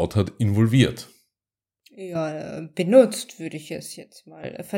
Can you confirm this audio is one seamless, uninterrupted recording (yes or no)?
yes